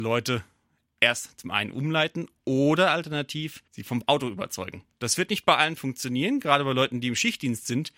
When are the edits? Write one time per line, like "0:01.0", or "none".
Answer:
0:03.7